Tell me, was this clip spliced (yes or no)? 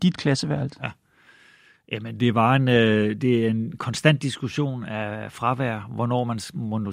no